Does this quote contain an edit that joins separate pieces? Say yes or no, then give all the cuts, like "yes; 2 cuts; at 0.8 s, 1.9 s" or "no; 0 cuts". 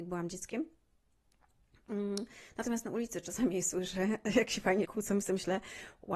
yes; 1 cut; at 4.8 s